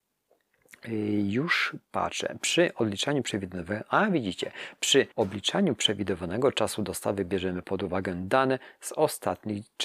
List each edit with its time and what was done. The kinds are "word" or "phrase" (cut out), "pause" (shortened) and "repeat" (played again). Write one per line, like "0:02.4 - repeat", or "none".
0:05.1 - pause